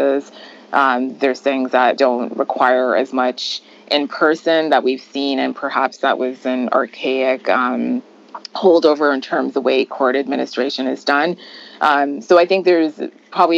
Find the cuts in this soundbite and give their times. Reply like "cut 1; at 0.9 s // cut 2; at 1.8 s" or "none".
cut 1; at 2.0 s // cut 2; at 9.5 s

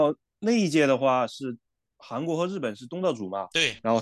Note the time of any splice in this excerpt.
none

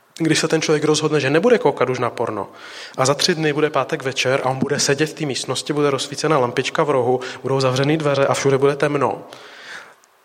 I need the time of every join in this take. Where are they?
none

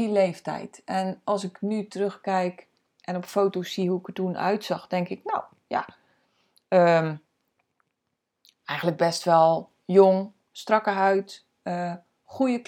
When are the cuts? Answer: none

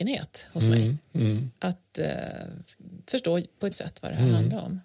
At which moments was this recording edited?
cut 1; at 3.7 s

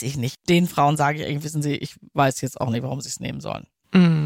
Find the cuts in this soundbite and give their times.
none

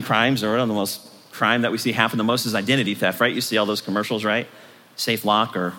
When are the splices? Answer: none

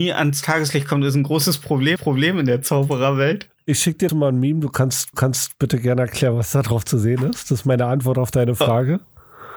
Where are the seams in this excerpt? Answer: cut 1; at 2.0 s // cut 2; at 4.1 s // cut 3; at 5.1 s

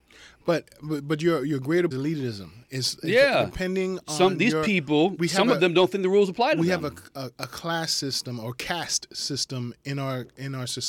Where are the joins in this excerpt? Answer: cut 1; at 1.9 s

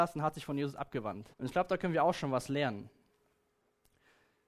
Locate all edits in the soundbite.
cut 1; at 1.3 s

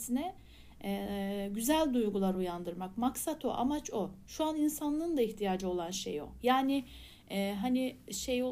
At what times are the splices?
none

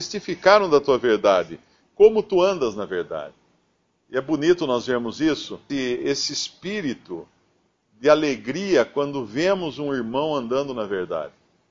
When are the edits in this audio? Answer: cut 1; at 5.7 s

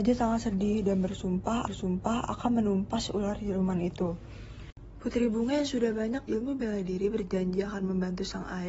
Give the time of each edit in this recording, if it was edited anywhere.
cut 1; at 1.7 s // cut 2; at 6.3 s

